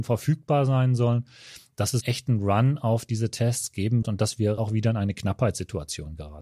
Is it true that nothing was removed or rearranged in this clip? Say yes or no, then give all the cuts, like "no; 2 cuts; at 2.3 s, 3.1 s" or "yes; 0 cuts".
no; 3 cuts; at 2.0 s, 4.0 s, 4.6 s